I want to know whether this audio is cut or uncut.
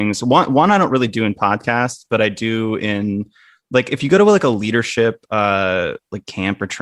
uncut